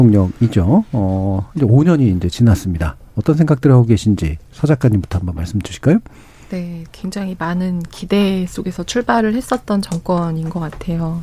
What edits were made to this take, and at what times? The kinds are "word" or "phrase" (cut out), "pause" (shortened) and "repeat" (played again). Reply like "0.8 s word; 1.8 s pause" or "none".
none